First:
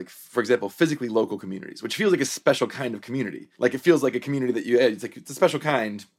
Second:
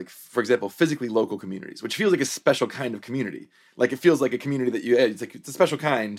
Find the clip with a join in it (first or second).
first